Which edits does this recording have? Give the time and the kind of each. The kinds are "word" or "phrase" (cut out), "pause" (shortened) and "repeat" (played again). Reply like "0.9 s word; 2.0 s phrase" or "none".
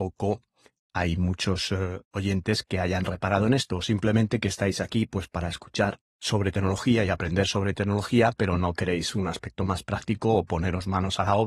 none